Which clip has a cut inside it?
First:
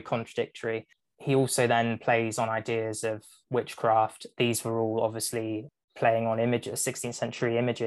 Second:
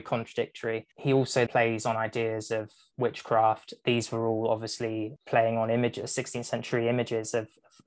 second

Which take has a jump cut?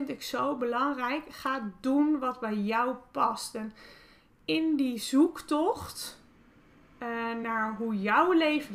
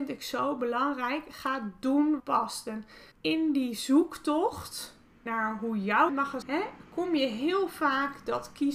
second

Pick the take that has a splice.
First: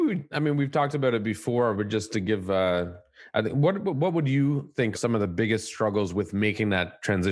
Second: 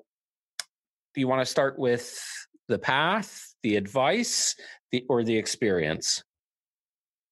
first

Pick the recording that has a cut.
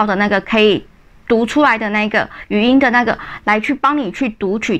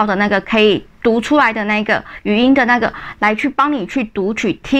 second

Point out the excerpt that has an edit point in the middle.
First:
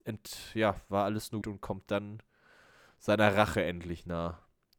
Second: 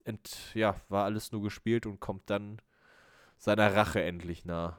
first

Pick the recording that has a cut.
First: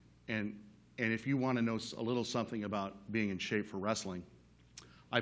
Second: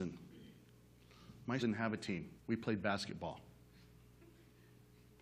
second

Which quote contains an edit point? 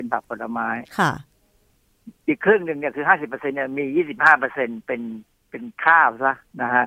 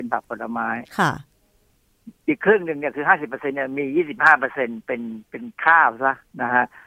second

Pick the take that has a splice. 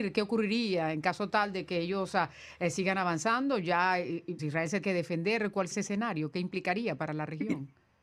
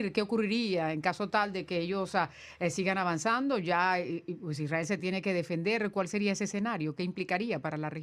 first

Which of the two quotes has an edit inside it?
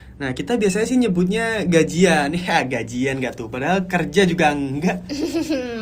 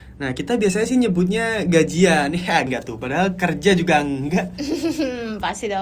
second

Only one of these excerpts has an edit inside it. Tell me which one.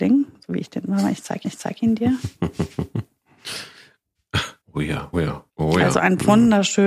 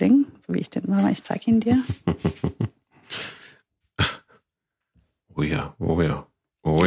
first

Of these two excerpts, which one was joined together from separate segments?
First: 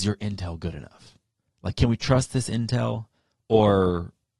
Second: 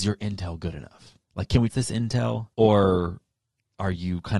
second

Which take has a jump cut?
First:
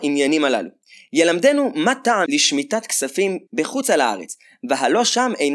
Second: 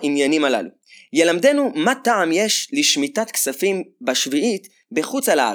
first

